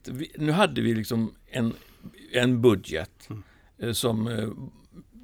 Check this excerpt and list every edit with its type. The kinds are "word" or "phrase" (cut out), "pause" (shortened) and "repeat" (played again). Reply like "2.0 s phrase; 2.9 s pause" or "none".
none